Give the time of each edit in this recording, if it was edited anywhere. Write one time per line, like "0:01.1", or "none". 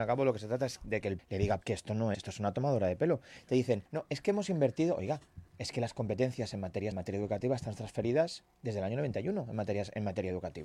0:01.2
0:01.6
0:02.1
0:03.9
0:05.5
0:06.9

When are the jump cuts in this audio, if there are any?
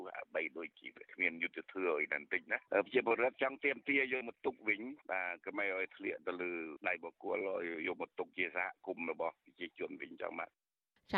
0:05.0

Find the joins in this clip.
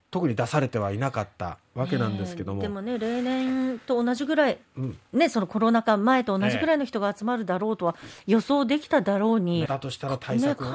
0:04.7
0:09.7

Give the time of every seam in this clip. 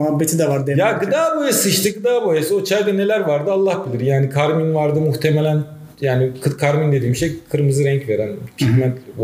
none

